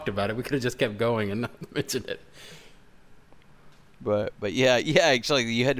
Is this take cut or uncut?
uncut